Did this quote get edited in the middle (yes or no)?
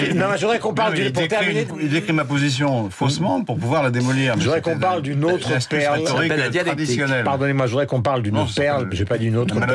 no